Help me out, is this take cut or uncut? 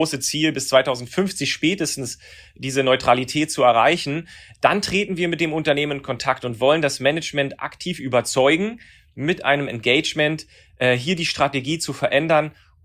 uncut